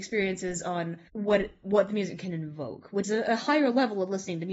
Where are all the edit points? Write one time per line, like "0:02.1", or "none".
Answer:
0:01.1
0:03.0